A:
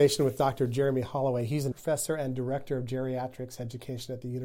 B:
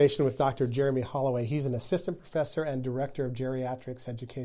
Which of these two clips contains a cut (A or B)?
A